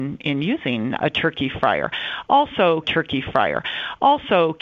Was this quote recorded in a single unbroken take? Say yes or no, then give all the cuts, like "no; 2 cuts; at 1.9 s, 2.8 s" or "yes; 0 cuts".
no; 2 cuts; at 1.0 s, 2.8 s